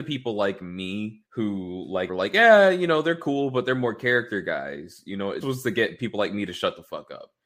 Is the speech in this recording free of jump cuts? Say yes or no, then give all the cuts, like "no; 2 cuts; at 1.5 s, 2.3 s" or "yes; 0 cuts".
no; 3 cuts; at 1.3 s, 2.1 s, 5.4 s